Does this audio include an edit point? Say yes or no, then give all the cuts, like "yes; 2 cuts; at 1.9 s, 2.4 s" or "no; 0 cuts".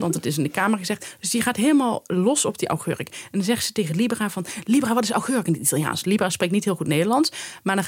no; 0 cuts